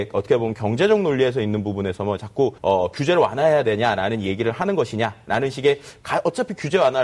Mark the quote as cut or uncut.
cut